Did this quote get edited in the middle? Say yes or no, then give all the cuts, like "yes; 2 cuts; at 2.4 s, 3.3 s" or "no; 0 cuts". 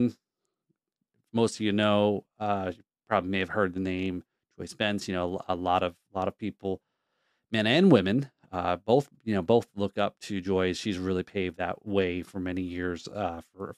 no; 0 cuts